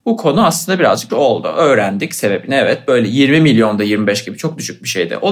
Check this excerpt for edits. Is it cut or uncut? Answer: cut